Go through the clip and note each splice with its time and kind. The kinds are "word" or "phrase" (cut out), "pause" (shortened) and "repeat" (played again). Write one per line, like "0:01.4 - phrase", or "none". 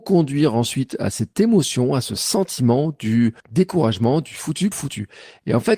0:03.4 - pause
0:04.7 - word